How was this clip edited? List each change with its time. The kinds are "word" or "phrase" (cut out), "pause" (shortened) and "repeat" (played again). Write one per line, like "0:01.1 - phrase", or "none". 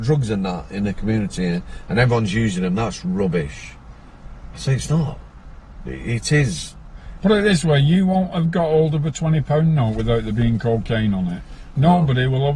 none